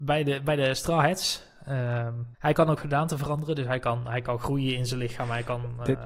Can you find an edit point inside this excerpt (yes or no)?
yes